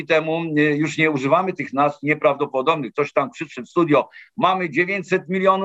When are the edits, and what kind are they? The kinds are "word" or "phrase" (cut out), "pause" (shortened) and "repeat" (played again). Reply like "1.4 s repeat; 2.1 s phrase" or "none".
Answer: none